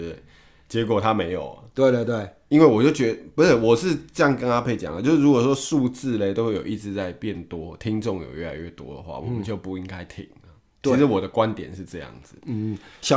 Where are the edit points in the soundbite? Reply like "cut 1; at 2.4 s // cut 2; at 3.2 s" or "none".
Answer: none